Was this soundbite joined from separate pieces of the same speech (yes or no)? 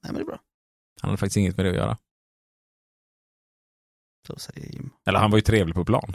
no